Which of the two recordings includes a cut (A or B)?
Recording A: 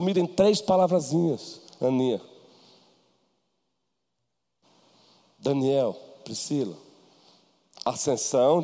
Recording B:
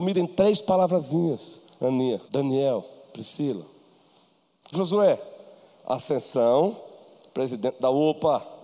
B